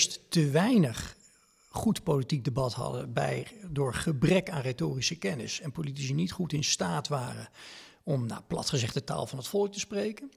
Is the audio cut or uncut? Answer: uncut